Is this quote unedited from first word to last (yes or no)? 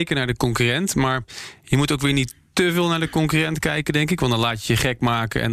yes